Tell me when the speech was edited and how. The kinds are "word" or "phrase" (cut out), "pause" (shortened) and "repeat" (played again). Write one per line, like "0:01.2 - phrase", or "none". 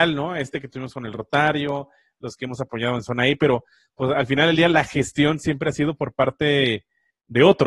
none